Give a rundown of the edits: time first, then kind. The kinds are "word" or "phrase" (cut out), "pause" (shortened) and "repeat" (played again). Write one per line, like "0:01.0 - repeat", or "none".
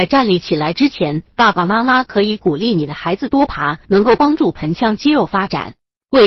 0:03.8 - pause